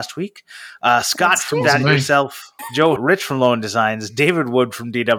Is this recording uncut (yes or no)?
no